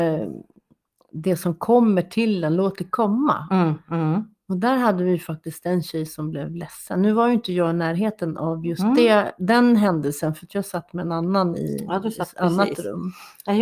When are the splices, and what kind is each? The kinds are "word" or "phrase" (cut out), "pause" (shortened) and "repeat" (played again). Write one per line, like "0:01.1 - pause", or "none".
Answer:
none